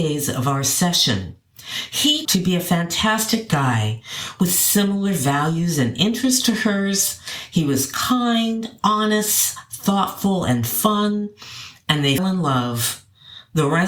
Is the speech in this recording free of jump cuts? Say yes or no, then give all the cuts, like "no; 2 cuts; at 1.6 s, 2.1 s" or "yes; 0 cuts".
no; 2 cuts; at 2.2 s, 12.2 s